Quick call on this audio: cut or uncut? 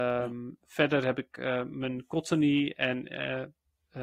uncut